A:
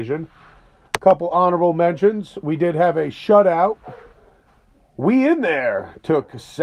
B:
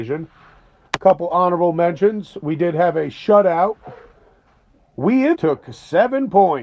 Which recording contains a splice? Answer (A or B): B